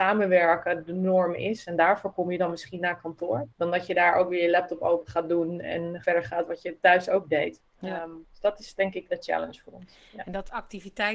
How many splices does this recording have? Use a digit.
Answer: 5